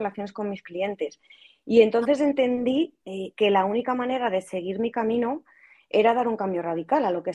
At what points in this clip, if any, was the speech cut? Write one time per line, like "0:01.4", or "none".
none